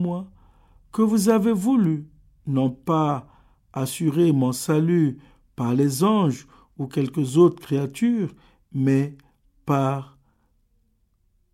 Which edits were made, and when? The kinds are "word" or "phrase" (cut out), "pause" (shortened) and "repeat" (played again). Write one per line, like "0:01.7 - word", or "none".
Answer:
none